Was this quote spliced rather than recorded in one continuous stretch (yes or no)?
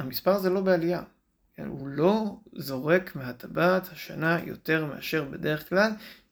no